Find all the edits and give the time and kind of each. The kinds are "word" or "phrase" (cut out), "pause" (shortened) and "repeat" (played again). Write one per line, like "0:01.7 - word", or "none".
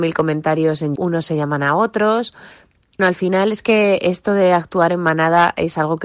0:01.0 - word
0:03.0 - word